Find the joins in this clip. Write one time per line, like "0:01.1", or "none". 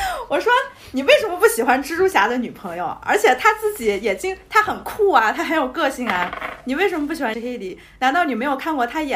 0:07.3